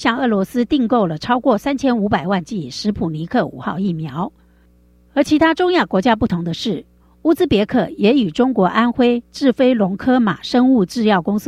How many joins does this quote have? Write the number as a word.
zero